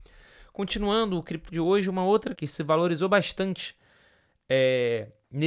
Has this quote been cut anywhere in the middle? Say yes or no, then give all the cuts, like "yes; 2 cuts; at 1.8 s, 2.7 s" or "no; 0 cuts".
yes; 2 cuts; at 1.5 s, 2.3 s